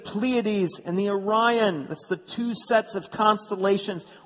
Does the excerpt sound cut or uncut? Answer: uncut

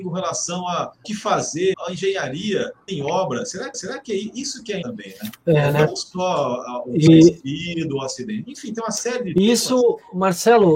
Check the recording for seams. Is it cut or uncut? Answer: cut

